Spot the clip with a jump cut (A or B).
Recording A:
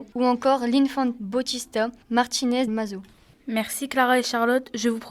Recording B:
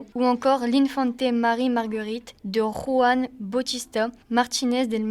A